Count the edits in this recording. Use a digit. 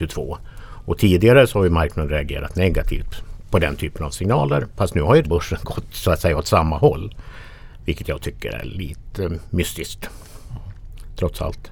1